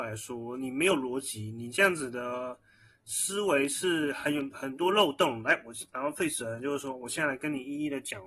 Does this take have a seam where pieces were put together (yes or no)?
no